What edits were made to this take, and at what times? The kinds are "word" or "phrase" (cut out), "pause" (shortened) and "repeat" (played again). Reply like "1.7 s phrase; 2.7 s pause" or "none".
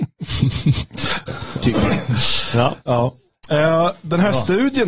1.3 s phrase; 2.8 s pause